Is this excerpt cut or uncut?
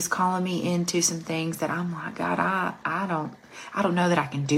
uncut